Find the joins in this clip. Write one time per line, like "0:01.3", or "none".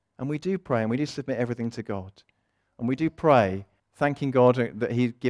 0:03.8